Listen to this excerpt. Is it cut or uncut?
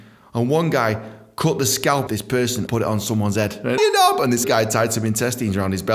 cut